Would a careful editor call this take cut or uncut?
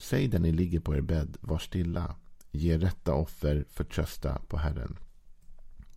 uncut